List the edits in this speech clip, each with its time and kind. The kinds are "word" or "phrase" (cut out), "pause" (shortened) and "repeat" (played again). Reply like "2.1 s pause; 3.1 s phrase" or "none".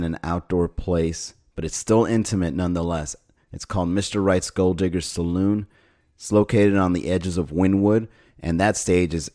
none